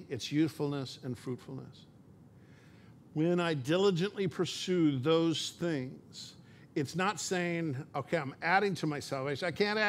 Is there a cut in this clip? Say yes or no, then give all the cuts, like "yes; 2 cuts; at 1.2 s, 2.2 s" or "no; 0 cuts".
no; 0 cuts